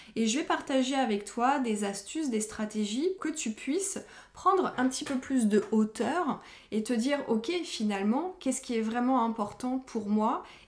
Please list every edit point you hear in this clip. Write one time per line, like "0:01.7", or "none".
0:03.2